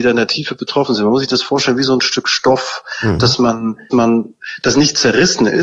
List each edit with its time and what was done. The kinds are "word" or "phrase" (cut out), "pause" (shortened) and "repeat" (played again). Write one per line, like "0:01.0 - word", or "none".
0:03.9 - word